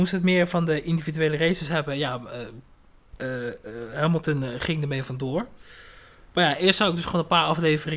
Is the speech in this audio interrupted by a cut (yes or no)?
no